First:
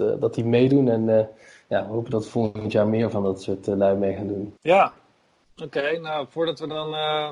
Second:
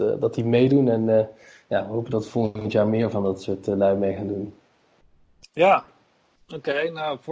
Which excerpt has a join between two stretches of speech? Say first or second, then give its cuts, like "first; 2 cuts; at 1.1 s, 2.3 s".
first; 1 cut; at 4.6 s